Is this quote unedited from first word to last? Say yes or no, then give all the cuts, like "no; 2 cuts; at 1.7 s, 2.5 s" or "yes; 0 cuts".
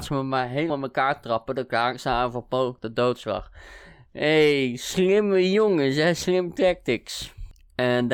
yes; 0 cuts